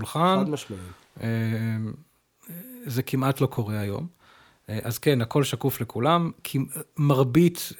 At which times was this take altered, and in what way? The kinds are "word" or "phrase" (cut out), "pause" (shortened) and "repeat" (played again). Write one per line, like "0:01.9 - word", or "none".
none